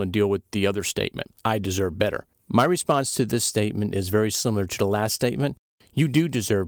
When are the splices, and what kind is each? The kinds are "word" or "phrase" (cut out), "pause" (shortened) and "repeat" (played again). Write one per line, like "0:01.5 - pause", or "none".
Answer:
0:01.4 - pause
0:02.3 - pause